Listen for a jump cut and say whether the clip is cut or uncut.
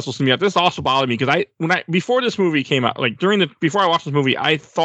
uncut